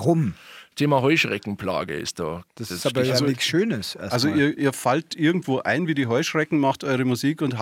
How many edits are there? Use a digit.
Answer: 2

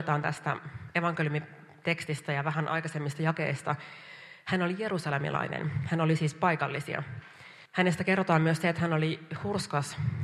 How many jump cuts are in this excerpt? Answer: 1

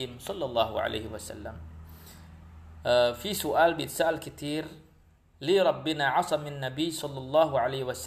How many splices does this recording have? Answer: 0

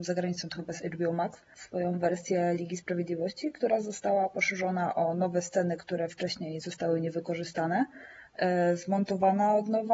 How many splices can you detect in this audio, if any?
0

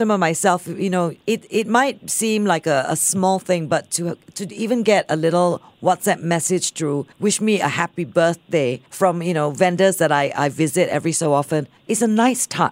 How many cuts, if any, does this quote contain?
4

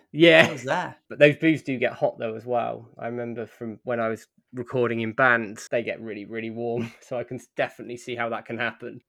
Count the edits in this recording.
1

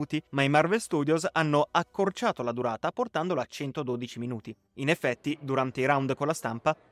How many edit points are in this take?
1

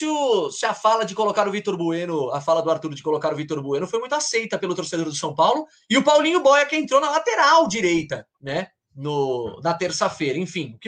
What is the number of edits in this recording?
1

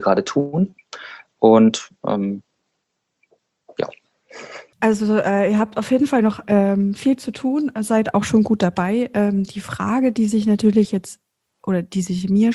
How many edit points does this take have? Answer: 1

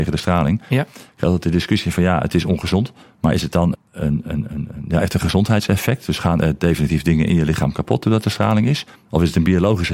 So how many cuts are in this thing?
2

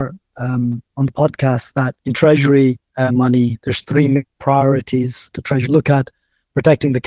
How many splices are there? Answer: 5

